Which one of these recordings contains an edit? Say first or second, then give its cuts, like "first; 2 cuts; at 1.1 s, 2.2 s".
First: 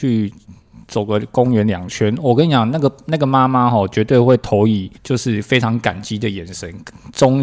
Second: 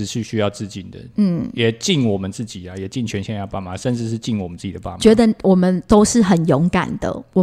first; 1 cut; at 5.0 s